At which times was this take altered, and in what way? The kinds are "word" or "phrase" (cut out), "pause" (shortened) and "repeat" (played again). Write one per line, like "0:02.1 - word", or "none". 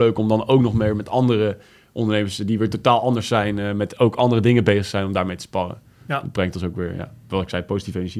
none